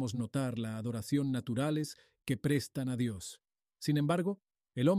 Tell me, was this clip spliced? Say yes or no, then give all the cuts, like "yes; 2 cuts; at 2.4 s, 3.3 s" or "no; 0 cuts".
no; 0 cuts